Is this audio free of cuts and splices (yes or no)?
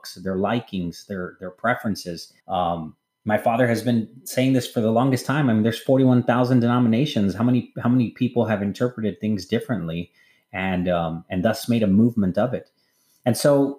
no